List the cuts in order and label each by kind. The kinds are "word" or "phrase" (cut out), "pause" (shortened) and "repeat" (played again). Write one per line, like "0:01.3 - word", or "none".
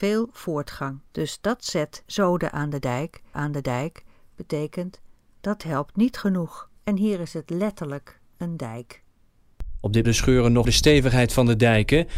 0:01.1 - pause
0:02.1 - word
0:03.3 - repeat
0:06.8 - pause
0:10.0 - phrase
0:10.6 - phrase